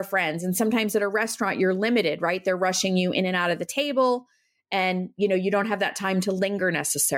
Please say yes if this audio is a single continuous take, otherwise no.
yes